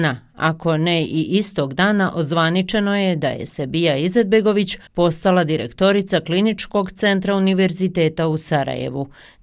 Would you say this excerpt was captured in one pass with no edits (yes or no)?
no